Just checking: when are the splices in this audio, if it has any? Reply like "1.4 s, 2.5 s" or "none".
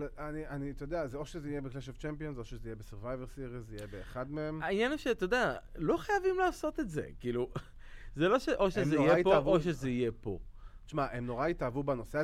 none